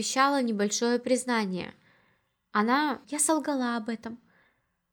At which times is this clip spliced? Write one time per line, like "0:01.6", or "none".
0:03.0

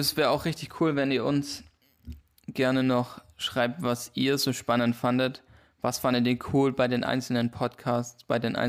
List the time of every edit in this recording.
none

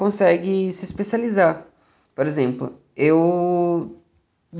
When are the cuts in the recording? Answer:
none

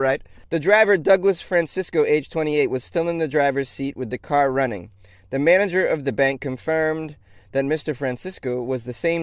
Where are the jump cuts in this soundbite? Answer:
none

